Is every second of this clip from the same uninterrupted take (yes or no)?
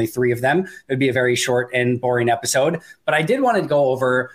yes